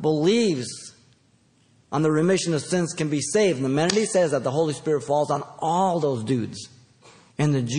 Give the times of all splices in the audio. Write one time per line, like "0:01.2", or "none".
none